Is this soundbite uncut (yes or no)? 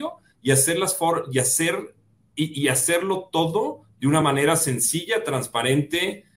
yes